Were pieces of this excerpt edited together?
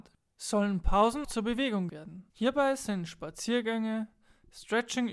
yes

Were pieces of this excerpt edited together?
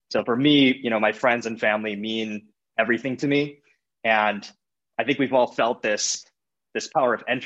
no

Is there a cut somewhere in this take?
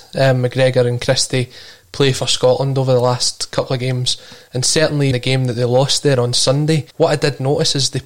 yes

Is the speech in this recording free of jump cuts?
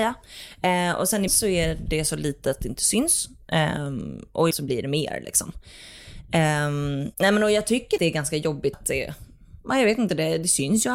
no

